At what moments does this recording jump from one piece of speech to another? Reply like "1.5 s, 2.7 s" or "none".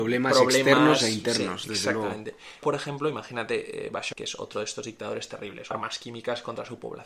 2.6 s, 4.1 s, 5.7 s